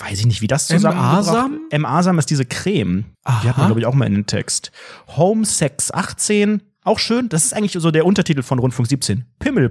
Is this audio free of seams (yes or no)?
no